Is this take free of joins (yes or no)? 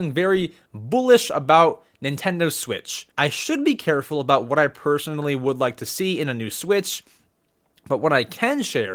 no